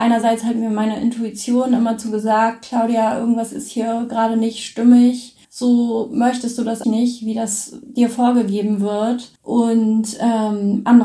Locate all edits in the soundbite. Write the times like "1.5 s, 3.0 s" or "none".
5.4 s, 6.8 s, 9.4 s